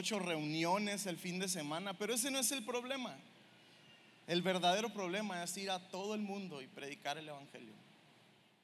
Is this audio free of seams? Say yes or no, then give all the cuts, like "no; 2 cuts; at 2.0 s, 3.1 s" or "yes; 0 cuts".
yes; 0 cuts